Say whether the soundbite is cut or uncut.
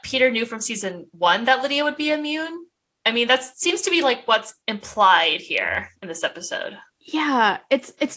uncut